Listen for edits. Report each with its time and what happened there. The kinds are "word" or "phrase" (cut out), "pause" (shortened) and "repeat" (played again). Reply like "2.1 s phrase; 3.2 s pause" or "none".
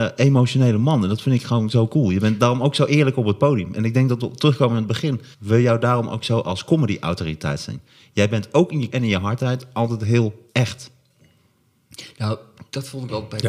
5.3 s pause; 8.9 s word